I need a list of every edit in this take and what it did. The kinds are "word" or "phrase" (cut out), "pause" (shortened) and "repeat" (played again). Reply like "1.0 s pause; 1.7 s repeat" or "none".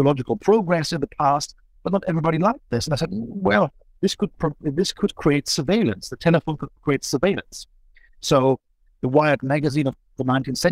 none